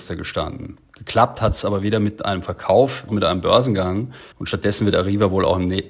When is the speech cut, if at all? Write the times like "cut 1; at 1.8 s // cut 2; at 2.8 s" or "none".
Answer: cut 1; at 3.1 s // cut 2; at 4.3 s

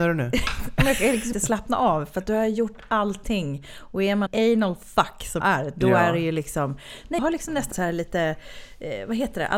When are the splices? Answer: cut 1; at 1.3 s // cut 2; at 4.3 s // cut 3; at 5.4 s // cut 4; at 7.2 s // cut 5; at 7.7 s

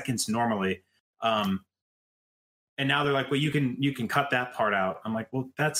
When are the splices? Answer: none

